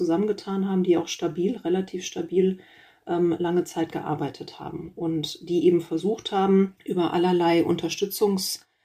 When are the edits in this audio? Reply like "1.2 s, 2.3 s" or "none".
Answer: none